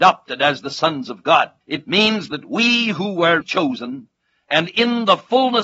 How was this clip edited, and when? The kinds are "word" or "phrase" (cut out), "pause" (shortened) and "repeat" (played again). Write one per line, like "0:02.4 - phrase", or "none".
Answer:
0:01.6 - pause
0:03.4 - word

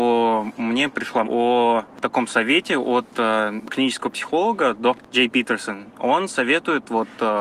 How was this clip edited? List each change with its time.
0:01.2 - word

